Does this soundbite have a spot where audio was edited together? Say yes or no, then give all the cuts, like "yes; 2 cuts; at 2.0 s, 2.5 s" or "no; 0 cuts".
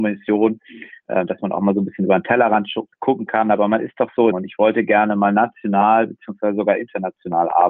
yes; 2 cuts; at 2.9 s, 4.3 s